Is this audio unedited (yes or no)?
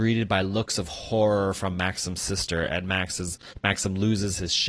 yes